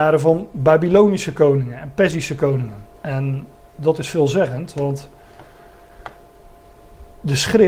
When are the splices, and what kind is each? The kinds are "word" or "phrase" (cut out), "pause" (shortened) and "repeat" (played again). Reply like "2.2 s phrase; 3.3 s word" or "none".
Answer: 3.0 s pause